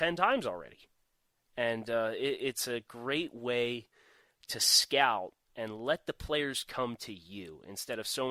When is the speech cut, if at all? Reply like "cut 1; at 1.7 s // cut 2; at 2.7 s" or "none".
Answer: none